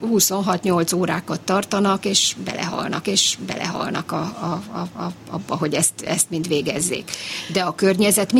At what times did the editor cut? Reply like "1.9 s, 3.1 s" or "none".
3.0 s, 5.0 s